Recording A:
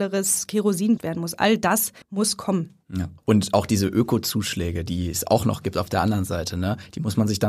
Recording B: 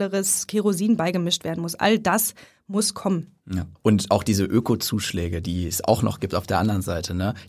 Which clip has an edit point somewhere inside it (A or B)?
A